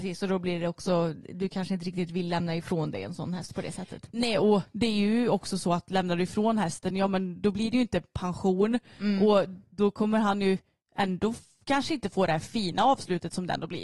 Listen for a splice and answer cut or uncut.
uncut